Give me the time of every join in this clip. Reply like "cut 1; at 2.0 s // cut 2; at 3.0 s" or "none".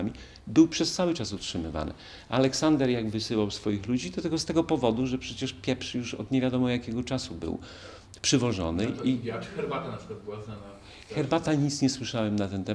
none